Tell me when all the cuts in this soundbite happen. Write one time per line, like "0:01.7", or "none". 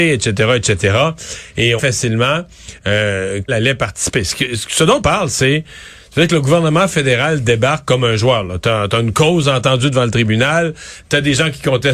0:01.8
0:03.5
0:05.0